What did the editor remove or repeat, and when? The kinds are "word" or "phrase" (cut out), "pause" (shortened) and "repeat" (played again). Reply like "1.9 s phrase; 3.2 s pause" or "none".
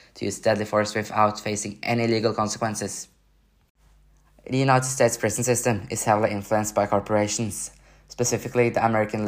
none